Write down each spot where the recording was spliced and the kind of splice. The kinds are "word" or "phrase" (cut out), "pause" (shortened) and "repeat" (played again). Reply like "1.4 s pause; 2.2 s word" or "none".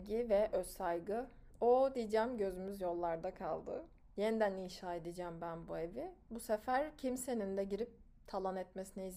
4.0 s pause